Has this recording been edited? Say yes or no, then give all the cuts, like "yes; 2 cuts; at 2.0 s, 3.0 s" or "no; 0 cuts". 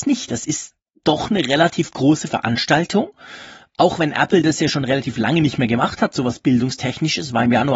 no; 0 cuts